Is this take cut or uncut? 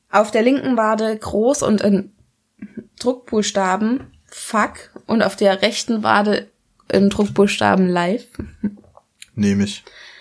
uncut